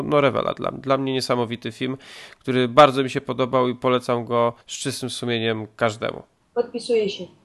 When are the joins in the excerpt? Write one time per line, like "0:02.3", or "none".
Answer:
0:04.6
0:06.4